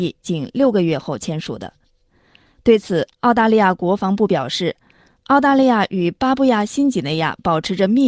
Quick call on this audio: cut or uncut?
uncut